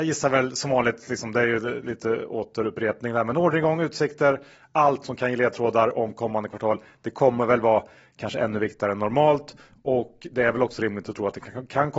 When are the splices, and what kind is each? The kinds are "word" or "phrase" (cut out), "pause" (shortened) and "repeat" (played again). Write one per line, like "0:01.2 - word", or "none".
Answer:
none